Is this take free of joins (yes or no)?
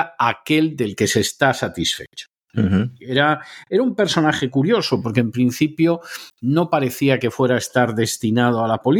yes